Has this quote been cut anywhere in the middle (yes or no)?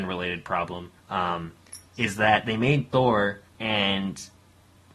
yes